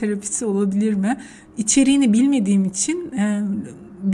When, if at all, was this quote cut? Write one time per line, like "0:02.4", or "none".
none